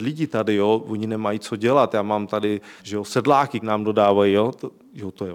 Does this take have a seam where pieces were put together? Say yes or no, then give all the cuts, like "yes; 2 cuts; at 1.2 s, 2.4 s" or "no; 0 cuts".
yes; 2 cuts; at 2.8 s, 3.6 s